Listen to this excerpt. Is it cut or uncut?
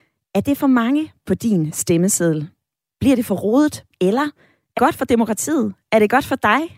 cut